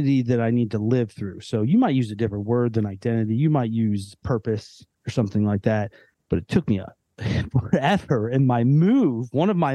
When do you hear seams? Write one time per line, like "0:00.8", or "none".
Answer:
none